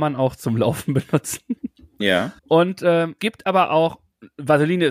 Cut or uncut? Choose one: cut